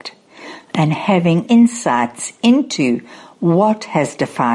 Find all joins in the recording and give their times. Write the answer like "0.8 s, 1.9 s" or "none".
1.5 s